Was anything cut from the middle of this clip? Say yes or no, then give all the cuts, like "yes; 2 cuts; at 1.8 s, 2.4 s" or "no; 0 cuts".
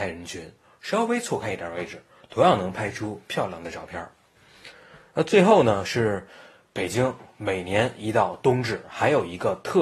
no; 0 cuts